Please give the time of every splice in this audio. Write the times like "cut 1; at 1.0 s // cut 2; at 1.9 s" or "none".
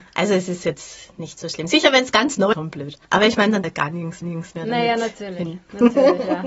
cut 1; at 1.1 s // cut 2; at 2.5 s // cut 3; at 3.0 s // cut 4; at 3.6 s // cut 5; at 4.2 s